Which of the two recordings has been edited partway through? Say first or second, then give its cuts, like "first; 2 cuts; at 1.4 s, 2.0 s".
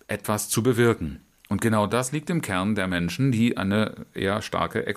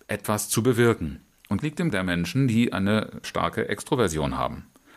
second; 3 cuts; at 1.6 s, 1.9 s, 3.2 s